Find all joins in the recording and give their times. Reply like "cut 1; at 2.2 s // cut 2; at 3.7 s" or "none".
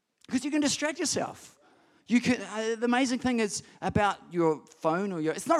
none